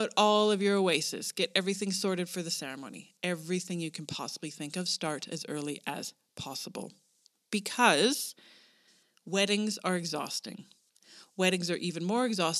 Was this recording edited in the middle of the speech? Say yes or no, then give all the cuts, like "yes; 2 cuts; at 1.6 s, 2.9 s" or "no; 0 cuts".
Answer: yes; 1 cut; at 7.1 s